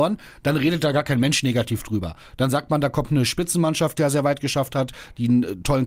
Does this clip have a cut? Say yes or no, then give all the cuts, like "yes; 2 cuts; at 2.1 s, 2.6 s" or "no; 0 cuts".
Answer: yes; 1 cut; at 4.0 s